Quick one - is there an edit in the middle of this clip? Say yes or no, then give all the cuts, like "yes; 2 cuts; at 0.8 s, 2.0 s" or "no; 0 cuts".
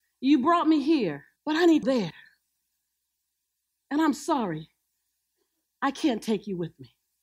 yes; 2 cuts; at 1.4 s, 1.8 s